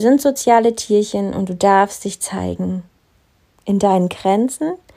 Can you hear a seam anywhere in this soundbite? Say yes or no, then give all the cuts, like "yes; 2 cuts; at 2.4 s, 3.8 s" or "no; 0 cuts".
no; 0 cuts